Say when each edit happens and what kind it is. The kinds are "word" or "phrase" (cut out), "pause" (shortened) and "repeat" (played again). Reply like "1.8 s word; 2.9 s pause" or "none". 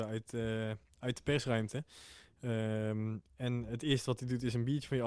3.7 s word